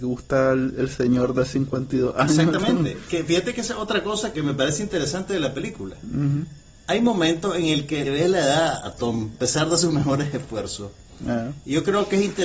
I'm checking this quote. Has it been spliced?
yes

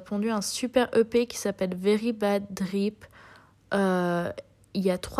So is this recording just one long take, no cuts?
yes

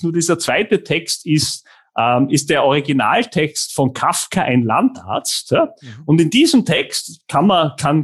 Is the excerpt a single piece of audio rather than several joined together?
yes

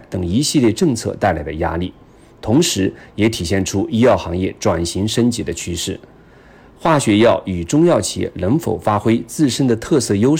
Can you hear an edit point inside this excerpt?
no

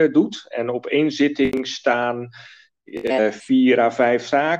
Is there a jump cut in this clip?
no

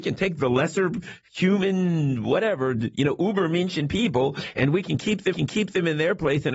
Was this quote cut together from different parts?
yes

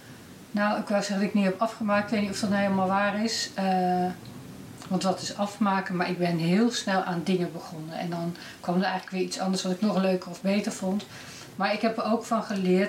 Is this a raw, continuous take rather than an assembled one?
no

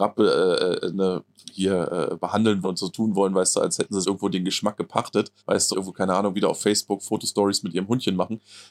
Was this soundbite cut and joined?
yes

